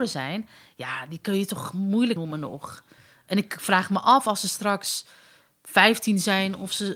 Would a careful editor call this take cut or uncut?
cut